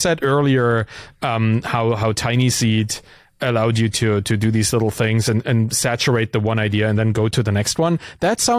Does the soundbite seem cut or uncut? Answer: uncut